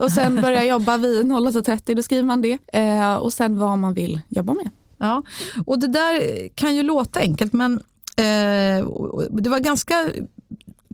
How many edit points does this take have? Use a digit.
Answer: 1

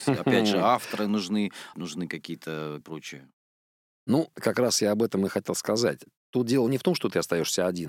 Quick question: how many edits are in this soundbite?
3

